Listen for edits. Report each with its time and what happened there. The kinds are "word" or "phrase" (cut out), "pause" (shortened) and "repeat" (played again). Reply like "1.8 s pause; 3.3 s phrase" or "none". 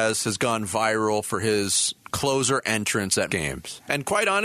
3.3 s word